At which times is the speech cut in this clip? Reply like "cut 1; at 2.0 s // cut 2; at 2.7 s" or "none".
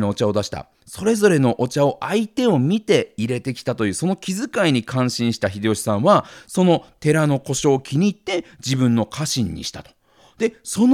none